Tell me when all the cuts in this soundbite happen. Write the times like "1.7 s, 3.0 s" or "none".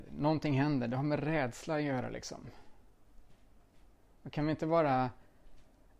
none